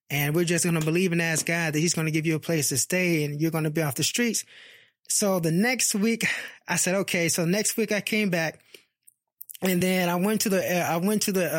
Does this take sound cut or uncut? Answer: uncut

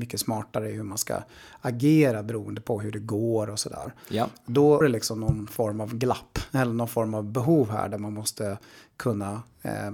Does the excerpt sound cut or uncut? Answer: cut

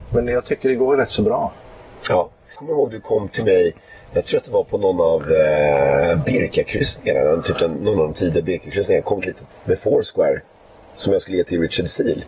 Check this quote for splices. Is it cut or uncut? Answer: cut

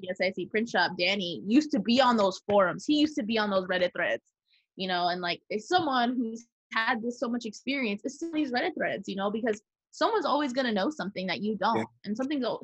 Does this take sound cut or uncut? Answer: uncut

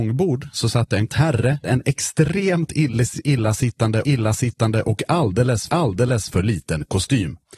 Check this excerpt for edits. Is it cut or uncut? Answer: cut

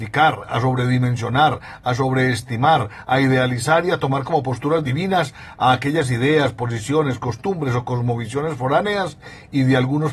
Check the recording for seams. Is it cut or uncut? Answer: uncut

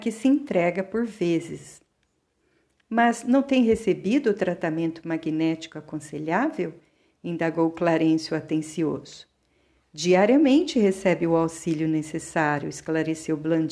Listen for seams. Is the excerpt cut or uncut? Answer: uncut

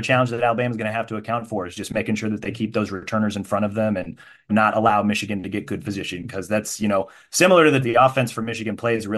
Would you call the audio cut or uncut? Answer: cut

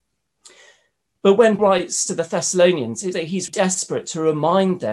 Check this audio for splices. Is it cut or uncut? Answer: cut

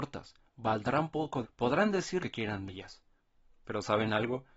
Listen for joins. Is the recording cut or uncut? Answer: cut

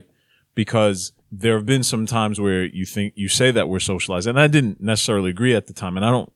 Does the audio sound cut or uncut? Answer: cut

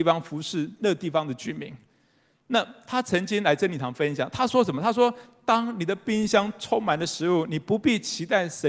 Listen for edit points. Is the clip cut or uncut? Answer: uncut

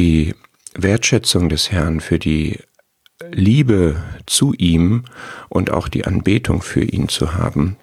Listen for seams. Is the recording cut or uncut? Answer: uncut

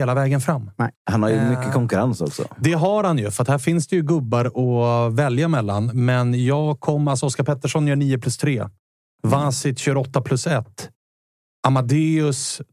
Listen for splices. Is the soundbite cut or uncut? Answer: uncut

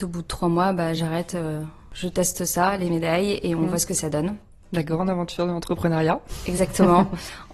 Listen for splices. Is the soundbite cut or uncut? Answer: uncut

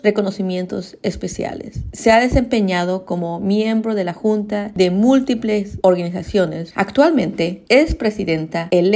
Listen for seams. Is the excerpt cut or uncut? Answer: uncut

